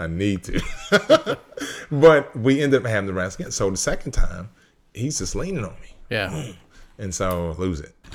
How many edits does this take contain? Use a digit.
0